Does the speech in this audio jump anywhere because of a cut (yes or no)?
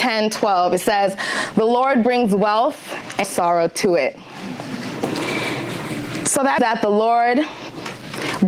yes